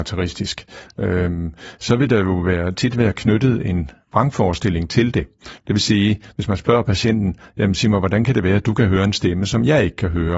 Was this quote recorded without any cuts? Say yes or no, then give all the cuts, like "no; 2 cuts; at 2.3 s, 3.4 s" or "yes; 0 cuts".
yes; 0 cuts